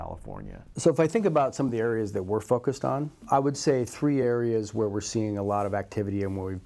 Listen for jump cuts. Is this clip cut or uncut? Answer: uncut